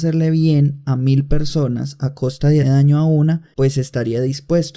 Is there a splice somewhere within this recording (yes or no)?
yes